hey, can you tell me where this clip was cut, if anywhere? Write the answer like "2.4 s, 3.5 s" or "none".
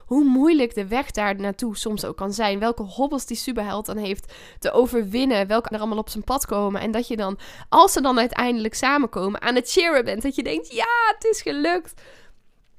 5.7 s

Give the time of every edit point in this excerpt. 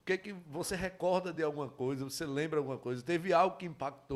none

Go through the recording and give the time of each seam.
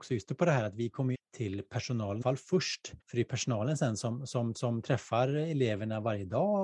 1.1 s, 2.2 s, 3.0 s, 4.5 s

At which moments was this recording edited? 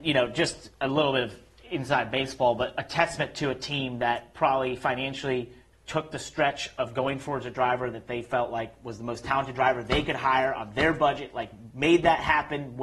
none

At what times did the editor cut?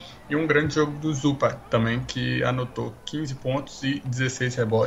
none

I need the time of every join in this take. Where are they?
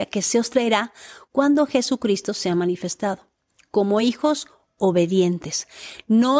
none

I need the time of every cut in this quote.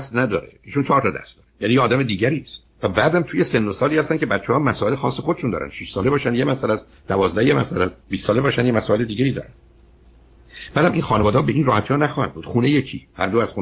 1.5 s, 2.7 s, 8.0 s

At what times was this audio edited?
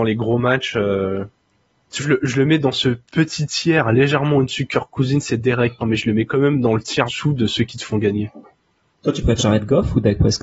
2.0 s, 5.8 s, 7.1 s, 9.4 s

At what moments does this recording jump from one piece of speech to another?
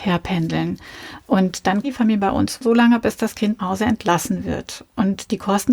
1.8 s, 2.6 s, 3.6 s

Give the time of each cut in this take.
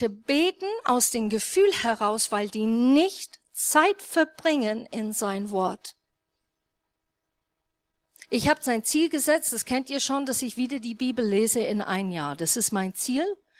none

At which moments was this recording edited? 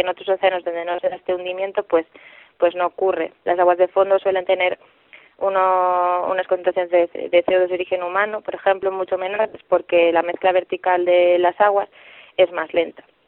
none

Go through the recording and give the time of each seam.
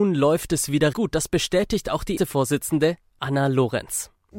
0.9 s, 2.2 s

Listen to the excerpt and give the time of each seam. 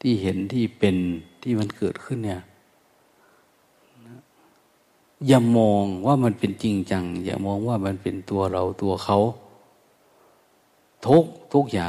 none

